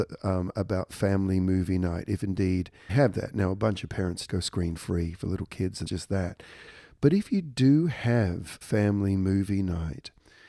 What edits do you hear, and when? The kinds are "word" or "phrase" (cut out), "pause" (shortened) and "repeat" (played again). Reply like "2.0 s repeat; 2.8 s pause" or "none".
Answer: 2.9 s word; 4.3 s word; 5.9 s word; 8.6 s word